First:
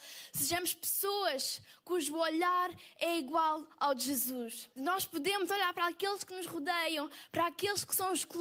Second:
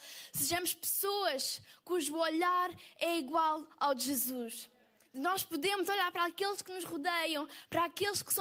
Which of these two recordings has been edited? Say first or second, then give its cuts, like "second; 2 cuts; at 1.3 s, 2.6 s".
first; 1 cut; at 4.7 s